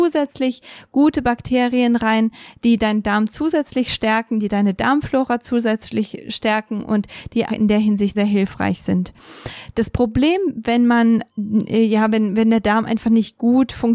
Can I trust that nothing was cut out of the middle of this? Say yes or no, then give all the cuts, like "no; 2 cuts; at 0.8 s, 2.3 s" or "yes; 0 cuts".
no; 3 cuts; at 7.5 s, 8.1 s, 11.3 s